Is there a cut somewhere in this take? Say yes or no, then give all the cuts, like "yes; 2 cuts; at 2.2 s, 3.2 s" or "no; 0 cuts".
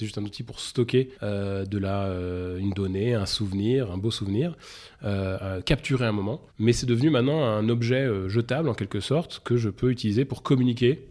yes; 2 cuts; at 1.1 s, 6.5 s